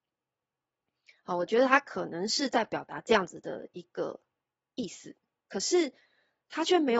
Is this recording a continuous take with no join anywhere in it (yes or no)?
yes